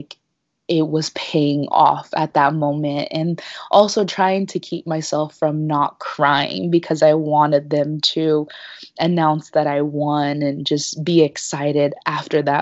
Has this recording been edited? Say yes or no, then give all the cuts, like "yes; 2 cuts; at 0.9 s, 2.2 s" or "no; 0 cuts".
no; 0 cuts